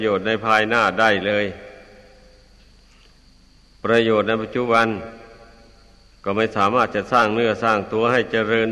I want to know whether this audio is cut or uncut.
uncut